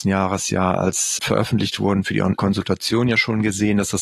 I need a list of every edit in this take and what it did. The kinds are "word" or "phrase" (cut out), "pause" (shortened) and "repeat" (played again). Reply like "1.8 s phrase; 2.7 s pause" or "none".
1.2 s word; 2.4 s word